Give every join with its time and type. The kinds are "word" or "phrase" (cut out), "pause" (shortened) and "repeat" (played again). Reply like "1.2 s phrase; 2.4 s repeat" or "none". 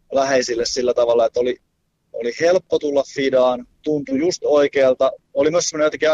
none